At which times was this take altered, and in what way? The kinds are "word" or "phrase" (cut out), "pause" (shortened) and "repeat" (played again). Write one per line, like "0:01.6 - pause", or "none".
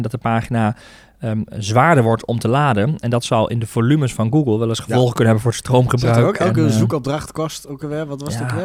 none